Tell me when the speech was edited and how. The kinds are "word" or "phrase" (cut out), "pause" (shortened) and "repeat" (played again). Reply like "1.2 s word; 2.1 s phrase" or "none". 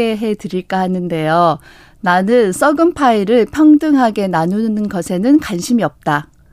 none

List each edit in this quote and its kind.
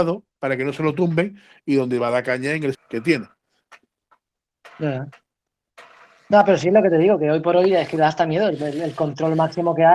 2.7 s word

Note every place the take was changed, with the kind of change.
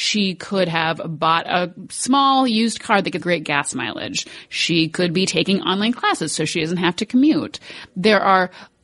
3.2 s word

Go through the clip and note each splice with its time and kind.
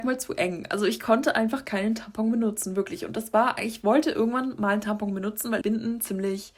5.6 s word

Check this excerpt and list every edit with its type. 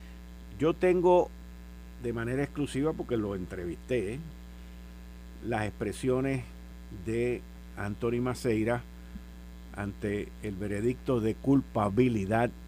none

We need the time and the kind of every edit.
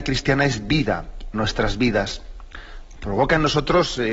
1.3 s phrase; 3.0 s word

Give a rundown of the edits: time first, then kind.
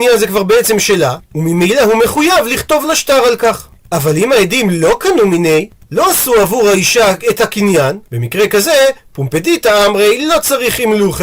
none

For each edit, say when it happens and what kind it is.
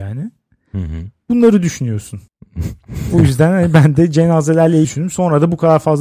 2.3 s pause; 4.8 s word

